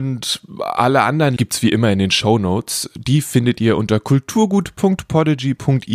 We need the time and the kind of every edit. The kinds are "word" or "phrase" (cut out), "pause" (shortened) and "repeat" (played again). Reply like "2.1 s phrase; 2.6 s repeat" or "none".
1.4 s word